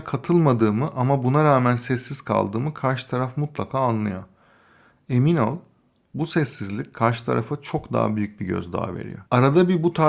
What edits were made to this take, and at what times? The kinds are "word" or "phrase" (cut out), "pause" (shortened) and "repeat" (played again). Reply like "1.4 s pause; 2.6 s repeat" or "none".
none